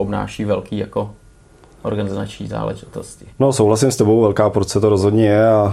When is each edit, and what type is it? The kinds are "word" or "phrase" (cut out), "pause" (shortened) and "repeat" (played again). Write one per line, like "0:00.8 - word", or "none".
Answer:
0:03.3 - pause

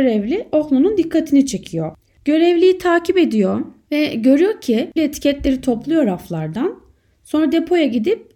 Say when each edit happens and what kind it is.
0:05.0 - word

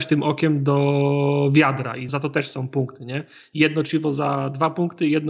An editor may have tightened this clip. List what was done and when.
0:02.1 - word

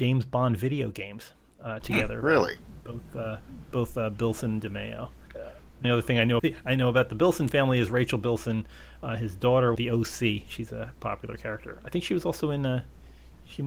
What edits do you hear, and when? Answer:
0:05.8 - word
0:06.4 - word
0:09.7 - phrase

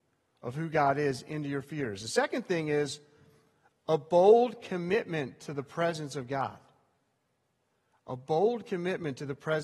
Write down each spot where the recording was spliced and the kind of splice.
none

